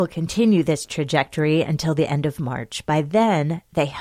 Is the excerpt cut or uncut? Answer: uncut